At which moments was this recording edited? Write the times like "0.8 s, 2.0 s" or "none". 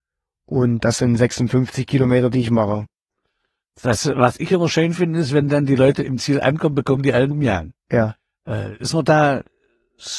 7.3 s